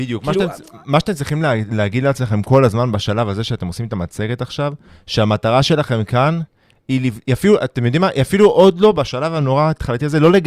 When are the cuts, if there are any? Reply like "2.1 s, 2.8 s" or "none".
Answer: none